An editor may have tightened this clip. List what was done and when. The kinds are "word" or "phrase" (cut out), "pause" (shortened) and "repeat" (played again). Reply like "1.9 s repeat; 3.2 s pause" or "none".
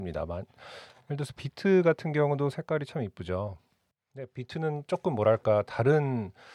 none